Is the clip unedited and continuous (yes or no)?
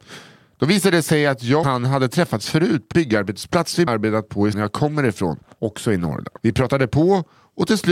no